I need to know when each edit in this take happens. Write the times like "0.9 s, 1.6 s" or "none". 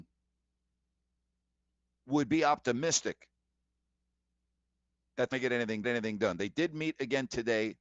5.3 s, 5.8 s